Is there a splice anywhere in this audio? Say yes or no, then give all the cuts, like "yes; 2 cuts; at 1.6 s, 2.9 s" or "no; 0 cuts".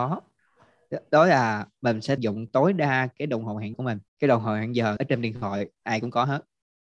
yes; 4 cuts; at 2.2 s, 3.7 s, 4.1 s, 5.0 s